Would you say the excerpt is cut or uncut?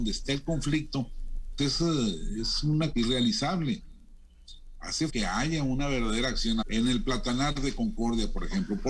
cut